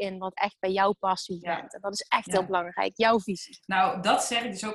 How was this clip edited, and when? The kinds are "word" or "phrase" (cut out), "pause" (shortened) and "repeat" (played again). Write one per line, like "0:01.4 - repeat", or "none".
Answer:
0:01.4 - word